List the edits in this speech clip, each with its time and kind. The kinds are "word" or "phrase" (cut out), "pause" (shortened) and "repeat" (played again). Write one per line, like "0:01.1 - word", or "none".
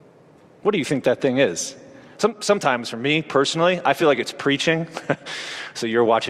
none